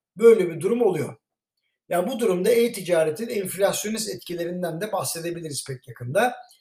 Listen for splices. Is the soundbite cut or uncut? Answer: uncut